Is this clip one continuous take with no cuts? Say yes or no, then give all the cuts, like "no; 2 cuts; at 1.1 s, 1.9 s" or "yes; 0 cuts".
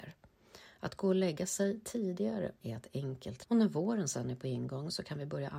no; 2 cuts; at 2.6 s, 3.4 s